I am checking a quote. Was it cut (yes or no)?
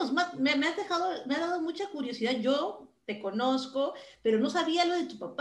no